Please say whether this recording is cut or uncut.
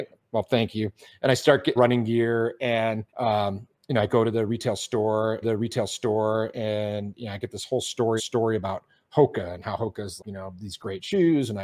cut